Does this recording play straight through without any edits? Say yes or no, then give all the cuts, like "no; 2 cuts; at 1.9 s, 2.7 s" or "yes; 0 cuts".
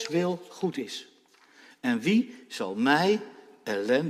yes; 0 cuts